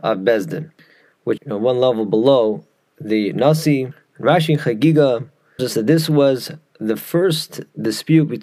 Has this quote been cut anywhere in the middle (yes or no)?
yes